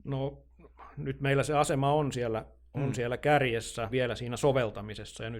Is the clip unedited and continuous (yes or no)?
no